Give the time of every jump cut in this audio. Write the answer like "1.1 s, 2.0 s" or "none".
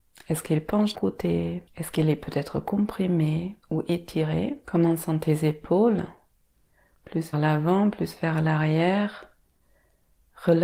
0.9 s, 1.7 s, 3.6 s, 4.6 s, 7.3 s